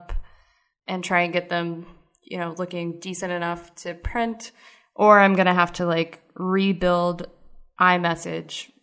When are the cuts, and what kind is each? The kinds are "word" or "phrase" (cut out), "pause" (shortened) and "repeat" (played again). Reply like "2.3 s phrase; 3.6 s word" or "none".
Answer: none